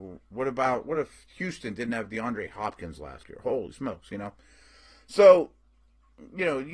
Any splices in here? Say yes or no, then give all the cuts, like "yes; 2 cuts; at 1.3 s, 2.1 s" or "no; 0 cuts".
no; 0 cuts